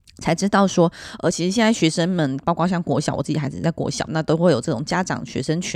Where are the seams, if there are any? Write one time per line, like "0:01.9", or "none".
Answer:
none